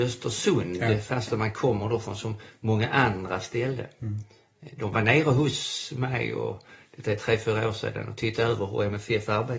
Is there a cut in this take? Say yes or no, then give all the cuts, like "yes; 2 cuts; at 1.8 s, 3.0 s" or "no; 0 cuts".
no; 0 cuts